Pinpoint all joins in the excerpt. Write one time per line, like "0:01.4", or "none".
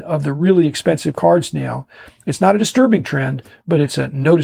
none